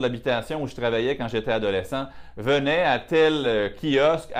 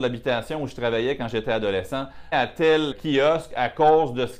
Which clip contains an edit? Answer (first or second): second